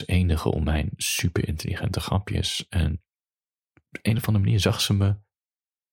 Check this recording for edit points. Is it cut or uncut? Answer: uncut